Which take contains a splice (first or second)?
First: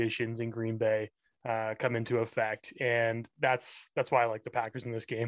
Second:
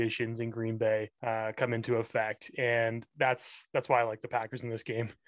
second